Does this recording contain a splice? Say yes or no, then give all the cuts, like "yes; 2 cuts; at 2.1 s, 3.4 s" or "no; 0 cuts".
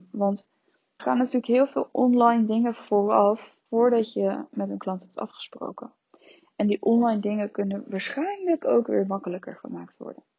yes; 2 cuts; at 1.0 s, 3.7 s